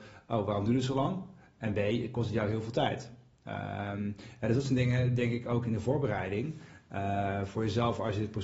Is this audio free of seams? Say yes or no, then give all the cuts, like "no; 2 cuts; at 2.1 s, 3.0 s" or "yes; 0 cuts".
yes; 0 cuts